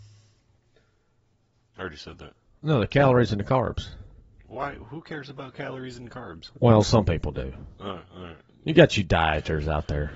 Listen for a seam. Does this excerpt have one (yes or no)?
yes